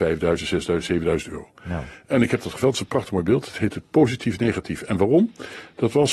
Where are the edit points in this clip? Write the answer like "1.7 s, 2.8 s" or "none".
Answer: none